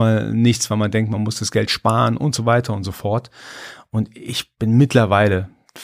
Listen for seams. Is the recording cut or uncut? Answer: uncut